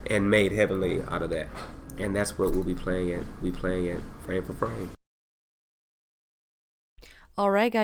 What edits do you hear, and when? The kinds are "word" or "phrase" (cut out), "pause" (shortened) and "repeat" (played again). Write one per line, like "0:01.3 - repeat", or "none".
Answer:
0:03.4 - repeat